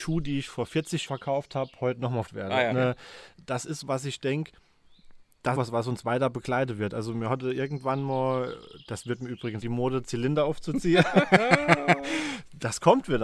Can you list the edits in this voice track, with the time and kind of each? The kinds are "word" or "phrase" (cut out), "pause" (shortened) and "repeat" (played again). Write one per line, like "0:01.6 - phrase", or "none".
0:01.1 - word
0:02.3 - word
0:02.7 - word
0:03.8 - word
0:05.6 - phrase
0:09.6 - phrase